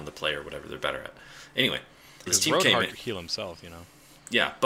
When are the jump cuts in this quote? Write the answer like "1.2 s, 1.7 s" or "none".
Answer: 2.3 s, 2.9 s